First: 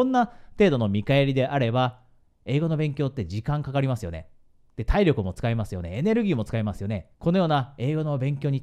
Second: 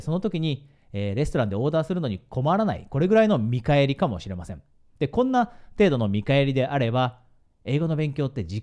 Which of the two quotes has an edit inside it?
first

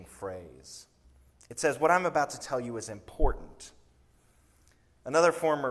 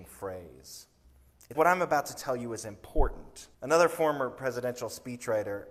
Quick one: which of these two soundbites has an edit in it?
second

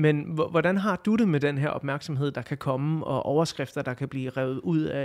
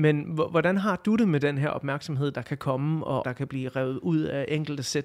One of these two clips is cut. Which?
second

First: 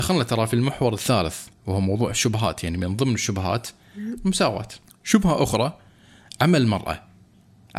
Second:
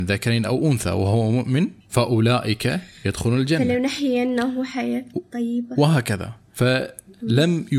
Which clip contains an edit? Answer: second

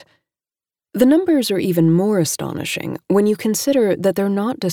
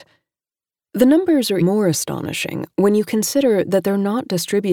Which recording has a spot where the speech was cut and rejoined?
second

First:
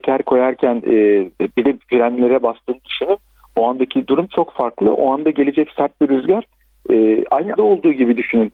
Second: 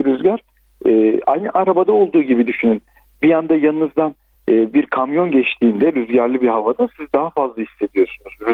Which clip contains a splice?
first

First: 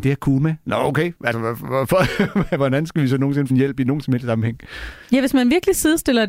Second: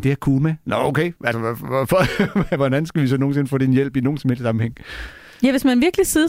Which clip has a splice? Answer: first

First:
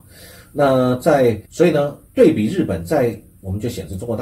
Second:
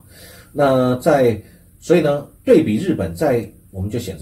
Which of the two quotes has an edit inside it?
first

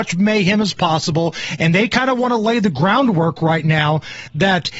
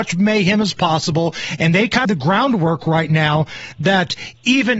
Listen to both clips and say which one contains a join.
second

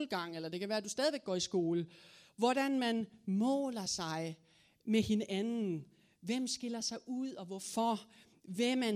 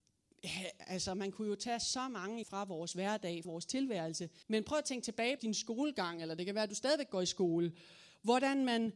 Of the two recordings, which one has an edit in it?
second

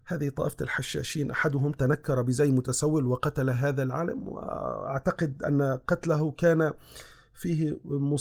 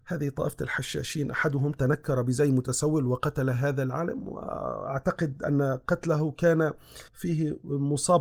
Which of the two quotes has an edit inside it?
second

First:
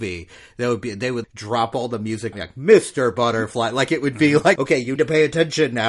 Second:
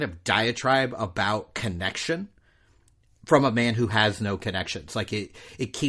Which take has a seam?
first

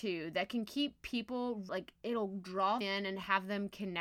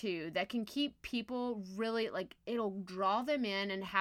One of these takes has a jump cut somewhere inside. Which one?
first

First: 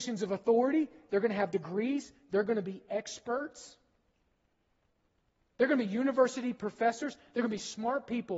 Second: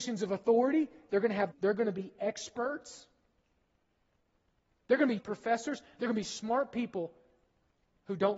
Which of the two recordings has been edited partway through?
second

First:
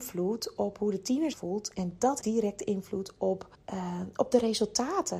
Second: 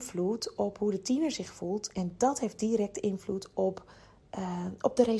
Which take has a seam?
first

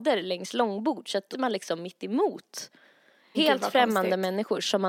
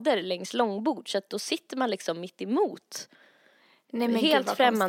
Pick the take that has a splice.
first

